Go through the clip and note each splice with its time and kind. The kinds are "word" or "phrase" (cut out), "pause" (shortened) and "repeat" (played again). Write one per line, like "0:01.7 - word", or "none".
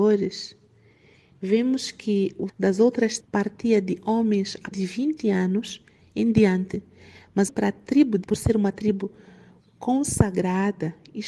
0:02.5 - word
0:03.2 - word
0:04.7 - word
0:07.5 - word
0:08.2 - word